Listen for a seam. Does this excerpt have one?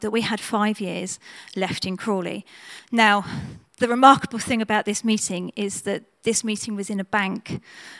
no; 0 cuts

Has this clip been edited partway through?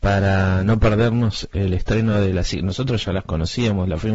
no; 0 cuts

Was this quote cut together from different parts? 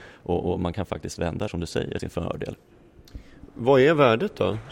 yes; 2 cuts; at 1.5 s, 2.0 s

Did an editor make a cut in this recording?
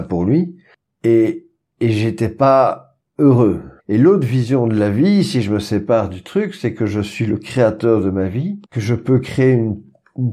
yes; 2 cuts; at 3.8 s, 8.6 s

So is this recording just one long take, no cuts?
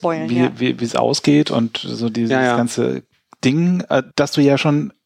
no; 1 cut; at 4.1 s

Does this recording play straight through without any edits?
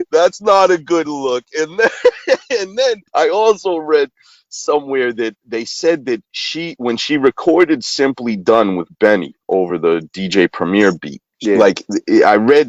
no; 2 cuts; at 3.1 s, 11.3 s

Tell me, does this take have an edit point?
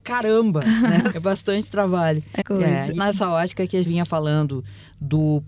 yes; 4 cuts; at 1.1 s, 2.4 s, 3.0 s, 3.8 s

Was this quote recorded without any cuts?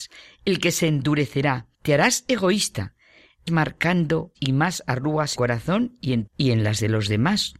no; 5 cuts; at 1.7 s, 3.5 s, 4.3 s, 5.3 s, 6.3 s

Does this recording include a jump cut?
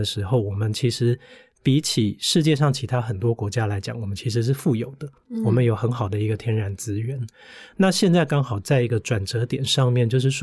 no; 0 cuts

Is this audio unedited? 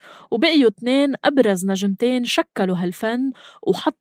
yes; 0 cuts

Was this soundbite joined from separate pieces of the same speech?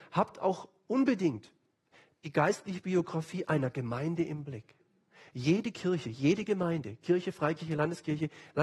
no; 0 cuts

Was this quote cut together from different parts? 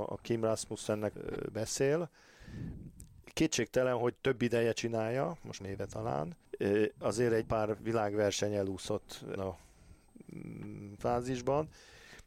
yes; 6 cuts; at 1.1 s, 5.6 s, 6.5 s, 7.4 s, 9.4 s, 11.0 s

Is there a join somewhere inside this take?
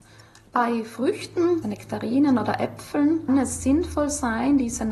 yes; 2 cuts; at 1.6 s, 3.3 s

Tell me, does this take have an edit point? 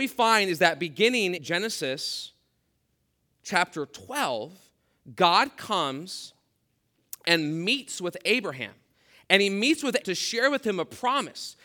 yes; 2 cuts; at 1.4 s, 10.0 s

